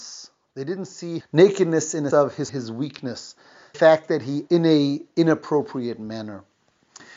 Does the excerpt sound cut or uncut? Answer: cut